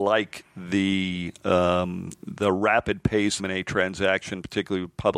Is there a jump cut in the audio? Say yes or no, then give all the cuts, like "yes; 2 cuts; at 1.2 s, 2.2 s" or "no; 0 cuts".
yes; 1 cut; at 3.4 s